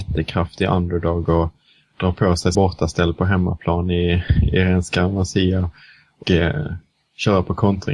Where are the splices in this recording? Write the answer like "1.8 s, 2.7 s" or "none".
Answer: 2.5 s, 6.2 s